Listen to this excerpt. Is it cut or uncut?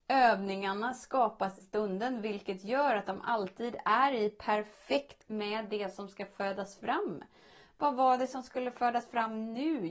cut